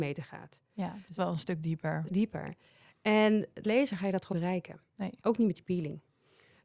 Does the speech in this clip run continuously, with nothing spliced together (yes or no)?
no